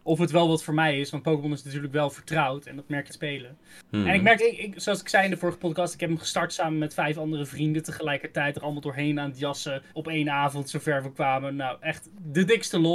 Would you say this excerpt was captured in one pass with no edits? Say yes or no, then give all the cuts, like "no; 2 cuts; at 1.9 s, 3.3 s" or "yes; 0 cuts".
no; 3 cuts; at 3.1 s, 4.4 s, 9.9 s